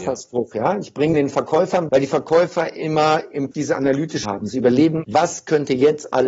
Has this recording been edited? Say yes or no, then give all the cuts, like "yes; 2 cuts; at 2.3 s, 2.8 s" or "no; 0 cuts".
yes; 5 cuts; at 1.1 s, 1.9 s, 3.5 s, 4.2 s, 5.0 s